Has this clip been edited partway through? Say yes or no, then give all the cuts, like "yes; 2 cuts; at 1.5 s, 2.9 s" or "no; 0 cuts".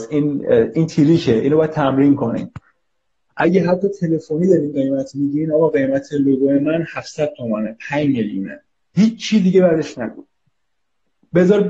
no; 0 cuts